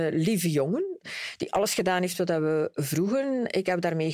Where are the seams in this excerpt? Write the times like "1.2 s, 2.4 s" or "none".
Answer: none